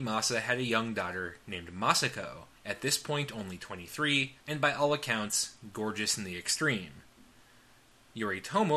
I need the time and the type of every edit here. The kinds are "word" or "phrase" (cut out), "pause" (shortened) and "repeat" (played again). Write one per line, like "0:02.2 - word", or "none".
0:02.6 - pause
0:04.4 - pause